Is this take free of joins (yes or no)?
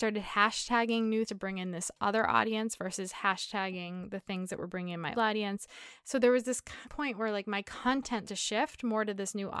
no